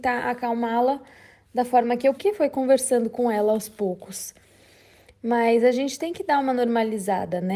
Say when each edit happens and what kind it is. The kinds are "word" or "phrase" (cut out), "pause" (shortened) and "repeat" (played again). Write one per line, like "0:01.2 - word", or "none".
0:02.2 - word